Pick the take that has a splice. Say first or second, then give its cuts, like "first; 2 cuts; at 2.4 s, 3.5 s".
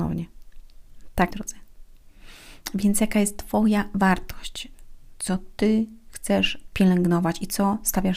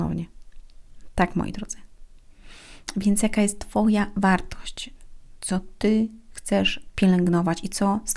first; 1 cut; at 1.3 s